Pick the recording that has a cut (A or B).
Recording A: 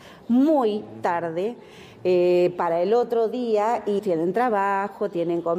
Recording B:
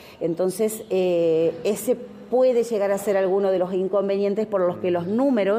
A